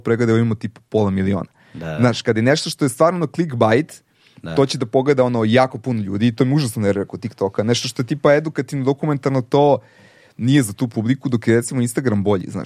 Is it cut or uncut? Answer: uncut